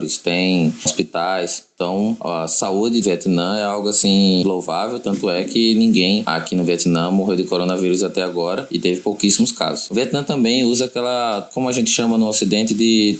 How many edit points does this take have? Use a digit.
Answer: 1